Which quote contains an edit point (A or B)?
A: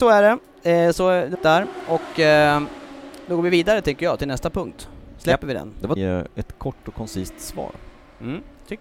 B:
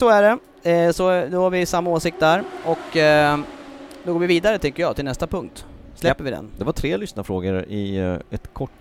A